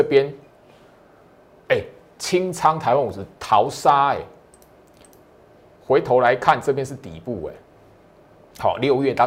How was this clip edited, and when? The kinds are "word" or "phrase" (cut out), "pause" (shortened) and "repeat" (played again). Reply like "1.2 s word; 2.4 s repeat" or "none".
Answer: none